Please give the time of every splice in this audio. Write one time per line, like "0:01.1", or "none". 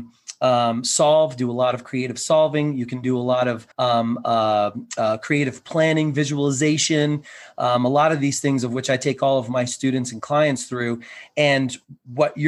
0:03.7